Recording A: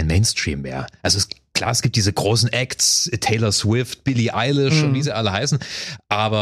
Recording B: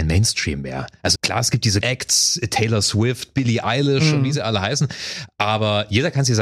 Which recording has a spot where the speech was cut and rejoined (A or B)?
B